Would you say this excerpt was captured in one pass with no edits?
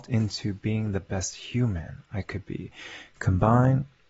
yes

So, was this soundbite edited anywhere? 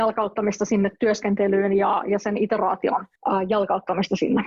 yes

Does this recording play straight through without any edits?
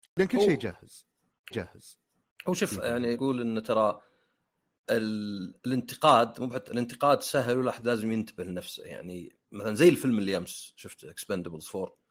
no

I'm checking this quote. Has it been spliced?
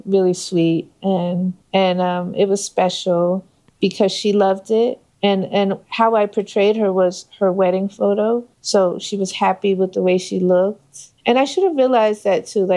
yes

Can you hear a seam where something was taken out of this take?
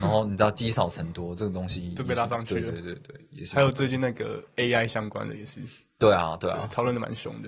no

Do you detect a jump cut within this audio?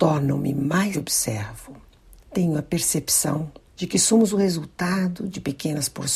yes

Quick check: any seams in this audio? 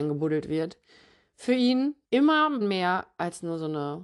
yes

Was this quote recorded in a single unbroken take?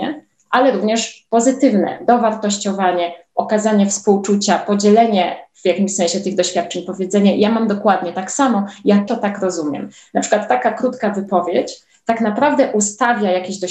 no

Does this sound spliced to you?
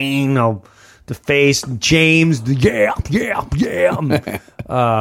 no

